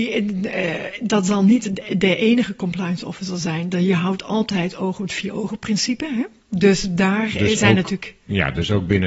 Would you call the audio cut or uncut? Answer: uncut